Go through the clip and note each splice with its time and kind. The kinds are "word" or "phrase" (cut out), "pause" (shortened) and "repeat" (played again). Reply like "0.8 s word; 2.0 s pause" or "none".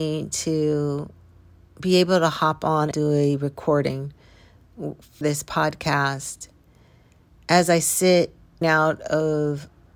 2.9 s word; 5.2 s word; 8.6 s word